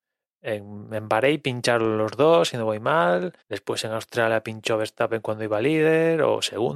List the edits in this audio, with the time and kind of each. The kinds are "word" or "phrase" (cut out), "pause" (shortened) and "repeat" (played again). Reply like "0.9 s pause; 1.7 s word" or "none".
3.4 s pause